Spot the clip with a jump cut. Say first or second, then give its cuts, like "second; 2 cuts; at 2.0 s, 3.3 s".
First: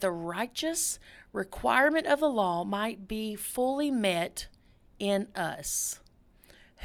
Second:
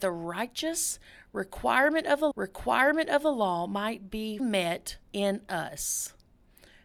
second; 3 cuts; at 2.3 s, 4.4 s, 5.0 s